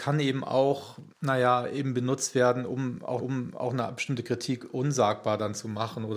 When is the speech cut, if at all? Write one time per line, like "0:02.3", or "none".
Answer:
0:01.1
0:03.2